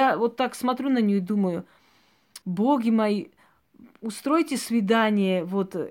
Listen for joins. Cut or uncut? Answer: cut